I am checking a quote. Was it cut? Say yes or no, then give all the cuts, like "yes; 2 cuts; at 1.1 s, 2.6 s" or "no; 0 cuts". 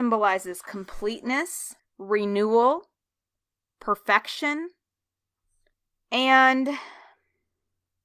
yes; 1 cut; at 1.8 s